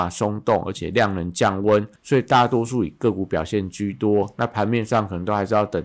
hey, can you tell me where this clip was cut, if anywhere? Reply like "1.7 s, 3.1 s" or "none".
2.0 s